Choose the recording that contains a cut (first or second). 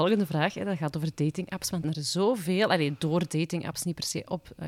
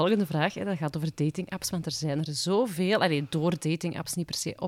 first